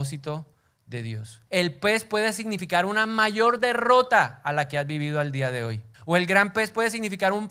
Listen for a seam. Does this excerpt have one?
yes; 2 cuts; at 1.5 s, 5.9 s

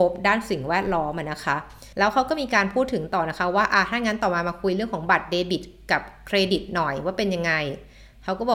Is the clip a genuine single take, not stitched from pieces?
no; 1 cut; at 1.9 s

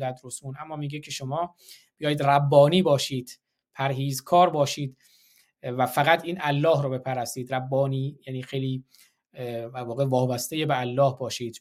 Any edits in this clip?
no; 0 cuts

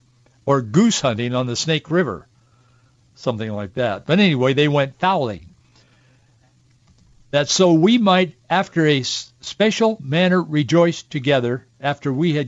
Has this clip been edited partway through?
no; 0 cuts

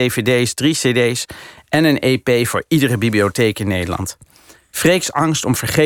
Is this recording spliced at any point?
no; 0 cuts

